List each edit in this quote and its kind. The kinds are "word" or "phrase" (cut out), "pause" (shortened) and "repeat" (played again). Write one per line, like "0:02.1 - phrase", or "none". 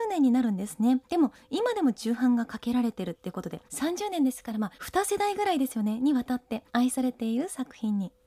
0:01.0 - pause
0:03.7 - pause
0:04.7 - pause
0:06.7 - pause